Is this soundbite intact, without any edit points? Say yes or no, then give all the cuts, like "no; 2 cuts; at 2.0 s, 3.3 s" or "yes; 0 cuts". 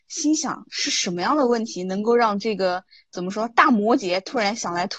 yes; 0 cuts